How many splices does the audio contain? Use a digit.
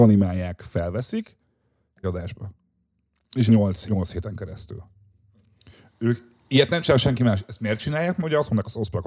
3